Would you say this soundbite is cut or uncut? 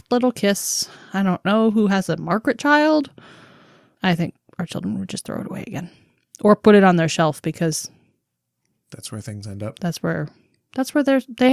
uncut